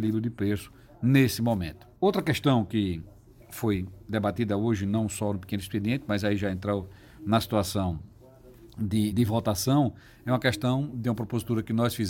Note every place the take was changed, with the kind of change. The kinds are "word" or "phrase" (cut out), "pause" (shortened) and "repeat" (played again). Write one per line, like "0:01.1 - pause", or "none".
0:02.0 - pause
0:09.1 - word